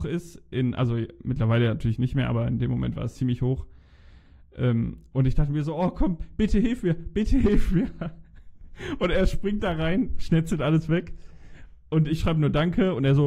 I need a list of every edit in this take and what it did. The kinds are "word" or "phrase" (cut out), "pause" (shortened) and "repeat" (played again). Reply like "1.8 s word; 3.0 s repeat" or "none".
none